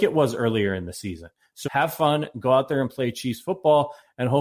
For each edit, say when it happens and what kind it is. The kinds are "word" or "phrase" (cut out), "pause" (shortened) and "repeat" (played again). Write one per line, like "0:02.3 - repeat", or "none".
0:01.6 - word